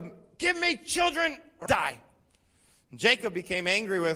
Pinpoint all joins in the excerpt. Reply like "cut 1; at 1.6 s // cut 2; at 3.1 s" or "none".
cut 1; at 1.7 s